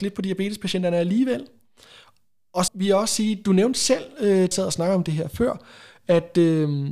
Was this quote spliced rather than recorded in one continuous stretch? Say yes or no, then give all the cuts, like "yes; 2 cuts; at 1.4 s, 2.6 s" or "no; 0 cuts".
yes; 2 cuts; at 2.7 s, 4.5 s